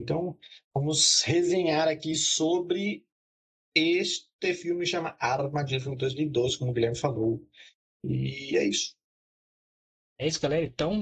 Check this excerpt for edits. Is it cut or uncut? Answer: uncut